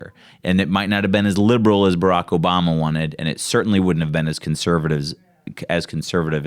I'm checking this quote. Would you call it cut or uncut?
uncut